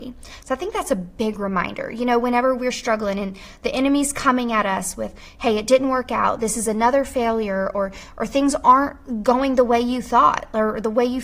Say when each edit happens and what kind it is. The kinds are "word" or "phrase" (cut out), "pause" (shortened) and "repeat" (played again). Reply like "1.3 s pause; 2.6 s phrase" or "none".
none